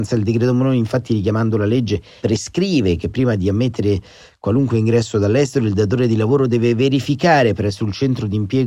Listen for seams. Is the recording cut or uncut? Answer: uncut